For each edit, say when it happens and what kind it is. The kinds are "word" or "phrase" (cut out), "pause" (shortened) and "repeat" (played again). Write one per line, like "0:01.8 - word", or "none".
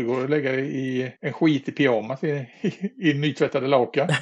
0:01.2 - pause
0:02.5 - pause